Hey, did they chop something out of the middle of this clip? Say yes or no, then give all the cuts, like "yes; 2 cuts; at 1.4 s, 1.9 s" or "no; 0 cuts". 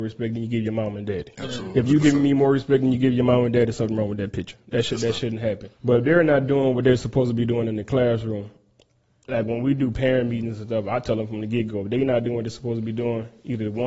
yes; 1 cut; at 5.8 s